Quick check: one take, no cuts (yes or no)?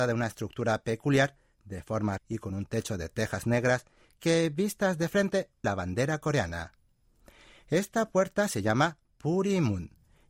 no